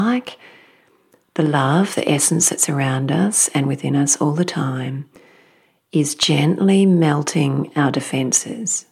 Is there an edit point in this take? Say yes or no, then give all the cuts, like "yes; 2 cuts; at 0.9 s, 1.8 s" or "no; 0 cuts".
no; 0 cuts